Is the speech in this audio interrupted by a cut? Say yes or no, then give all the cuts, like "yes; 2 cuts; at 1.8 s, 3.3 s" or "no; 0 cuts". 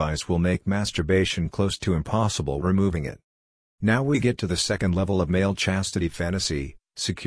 yes; 1 cut; at 2.6 s